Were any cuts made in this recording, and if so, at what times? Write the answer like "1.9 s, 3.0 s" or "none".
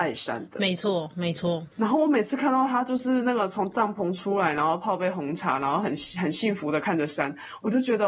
1.7 s